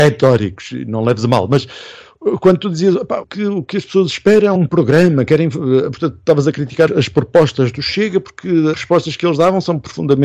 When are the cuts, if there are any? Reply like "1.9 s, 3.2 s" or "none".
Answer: 3.2 s, 4.6 s, 6.9 s, 8.7 s